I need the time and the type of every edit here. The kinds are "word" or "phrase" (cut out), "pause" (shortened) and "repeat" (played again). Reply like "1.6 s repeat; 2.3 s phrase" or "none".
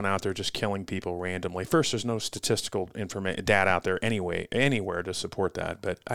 none

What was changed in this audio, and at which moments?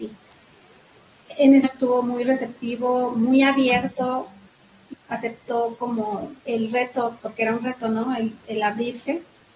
1.6 s phrase; 4.9 s word; 6.4 s pause

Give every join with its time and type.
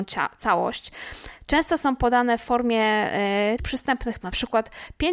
3.6 s word; 4.2 s word

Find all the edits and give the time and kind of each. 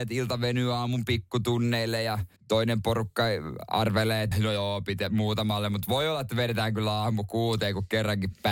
2.4 s pause; 4.3 s word

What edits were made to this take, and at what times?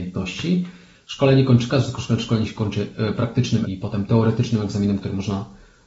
3.6 s word

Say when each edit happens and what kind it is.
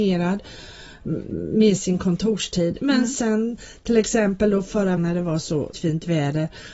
1.3 s word; 5.0 s word; 5.7 s word

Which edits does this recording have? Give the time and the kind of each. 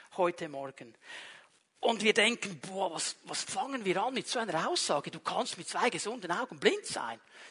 none

